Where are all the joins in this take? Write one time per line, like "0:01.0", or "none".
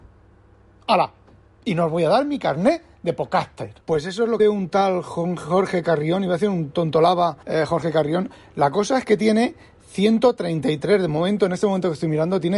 0:03.8
0:04.4
0:07.4